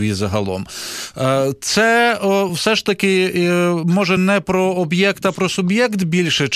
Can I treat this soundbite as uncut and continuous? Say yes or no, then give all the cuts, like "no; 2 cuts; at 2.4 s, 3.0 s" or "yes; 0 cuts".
yes; 0 cuts